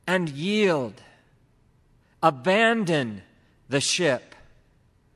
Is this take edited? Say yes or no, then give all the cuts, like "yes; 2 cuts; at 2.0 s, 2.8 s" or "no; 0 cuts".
no; 0 cuts